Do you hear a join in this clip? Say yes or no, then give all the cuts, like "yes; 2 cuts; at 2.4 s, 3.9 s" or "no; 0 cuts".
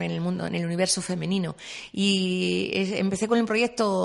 no; 0 cuts